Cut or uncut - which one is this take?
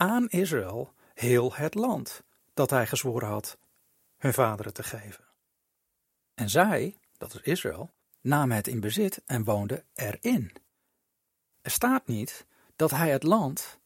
cut